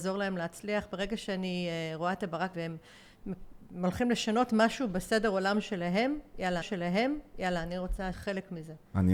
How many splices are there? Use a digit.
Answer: 3